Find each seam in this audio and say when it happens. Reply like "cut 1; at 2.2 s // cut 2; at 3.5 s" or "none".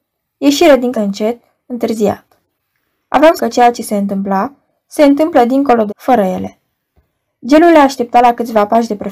cut 1; at 0.9 s // cut 2; at 3.4 s // cut 3; at 5.9 s